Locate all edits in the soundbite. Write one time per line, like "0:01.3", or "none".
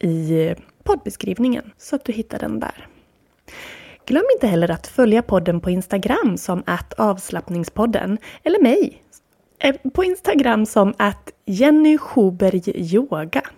0:01.7